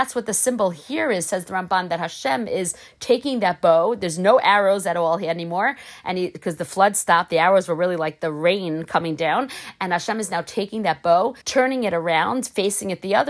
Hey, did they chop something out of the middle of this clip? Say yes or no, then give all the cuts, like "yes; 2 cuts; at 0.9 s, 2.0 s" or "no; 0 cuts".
yes; 1 cut; at 11.4 s